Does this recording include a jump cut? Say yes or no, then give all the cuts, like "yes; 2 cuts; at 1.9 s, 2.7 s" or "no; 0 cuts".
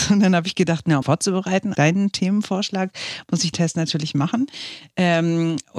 yes; 3 cuts; at 1.0 s, 1.7 s, 3.5 s